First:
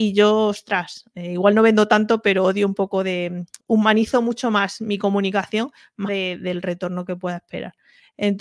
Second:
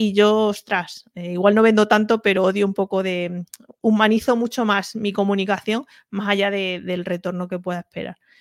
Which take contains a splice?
first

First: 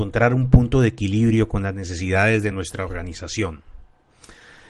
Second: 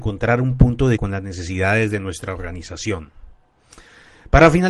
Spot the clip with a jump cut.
second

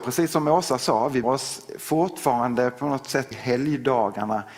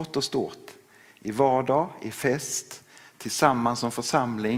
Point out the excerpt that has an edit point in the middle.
first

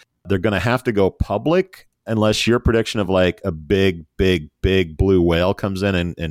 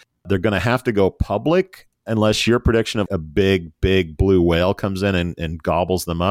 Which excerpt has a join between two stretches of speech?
second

